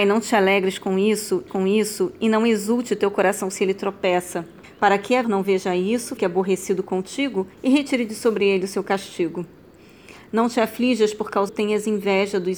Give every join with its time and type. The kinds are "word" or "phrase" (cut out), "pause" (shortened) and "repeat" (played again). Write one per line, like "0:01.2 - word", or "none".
0:01.5 - repeat
0:04.6 - pause
0:05.2 - phrase
0:06.2 - word
0:07.5 - pause
0:11.5 - phrase